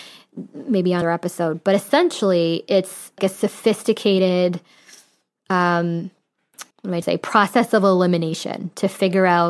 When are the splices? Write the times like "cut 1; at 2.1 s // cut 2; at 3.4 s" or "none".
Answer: cut 1; at 1.0 s // cut 2; at 3.2 s // cut 3; at 6.7 s // cut 4; at 7.0 s